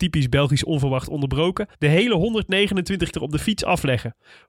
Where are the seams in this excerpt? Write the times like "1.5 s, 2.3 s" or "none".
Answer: 1.7 s, 3.1 s